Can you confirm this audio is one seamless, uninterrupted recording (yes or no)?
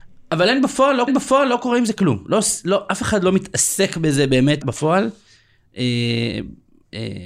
no